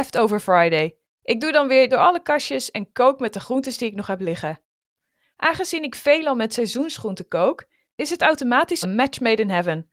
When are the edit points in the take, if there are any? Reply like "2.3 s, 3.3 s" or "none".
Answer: 1.0 s, 1.9 s, 8.8 s